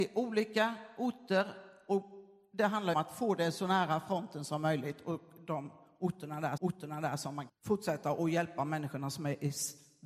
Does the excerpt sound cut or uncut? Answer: cut